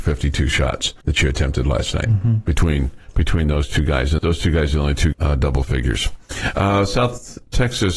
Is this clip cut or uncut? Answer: cut